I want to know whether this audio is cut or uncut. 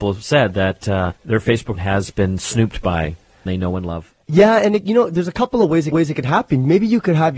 cut